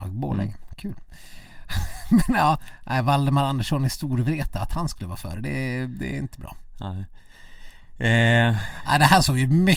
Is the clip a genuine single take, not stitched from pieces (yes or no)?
yes